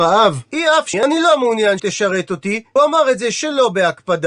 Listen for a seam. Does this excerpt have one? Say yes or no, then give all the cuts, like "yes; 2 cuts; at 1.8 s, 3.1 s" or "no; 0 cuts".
yes; 3 cuts; at 0.9 s, 1.8 s, 2.8 s